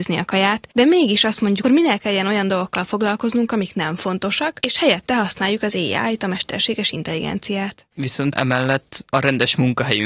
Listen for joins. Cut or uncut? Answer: cut